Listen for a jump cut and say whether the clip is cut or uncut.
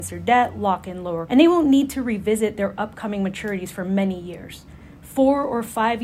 cut